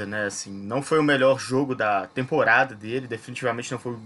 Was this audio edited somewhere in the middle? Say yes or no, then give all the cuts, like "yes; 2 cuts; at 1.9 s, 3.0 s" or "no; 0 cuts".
no; 0 cuts